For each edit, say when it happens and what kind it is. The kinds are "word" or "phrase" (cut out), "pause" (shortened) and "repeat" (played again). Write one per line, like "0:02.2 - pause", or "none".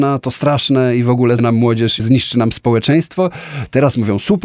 0:01.4 - word
0:02.0 - word